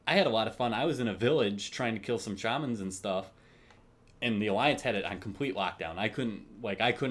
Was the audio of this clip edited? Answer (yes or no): no